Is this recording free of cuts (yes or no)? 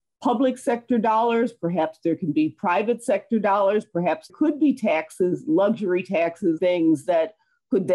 no